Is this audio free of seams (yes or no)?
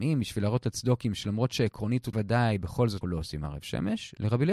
no